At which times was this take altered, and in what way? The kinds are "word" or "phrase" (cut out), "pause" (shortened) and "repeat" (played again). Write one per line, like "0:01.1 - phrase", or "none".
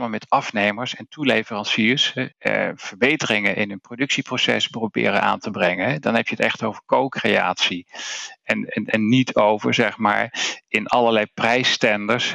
0:02.3 - pause